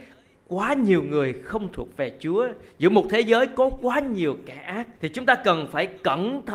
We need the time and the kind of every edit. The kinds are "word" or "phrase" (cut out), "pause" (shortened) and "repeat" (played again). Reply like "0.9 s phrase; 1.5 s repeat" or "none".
5.0 s pause